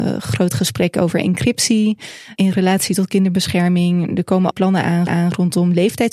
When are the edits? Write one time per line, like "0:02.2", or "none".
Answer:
0:02.4
0:04.5
0:05.1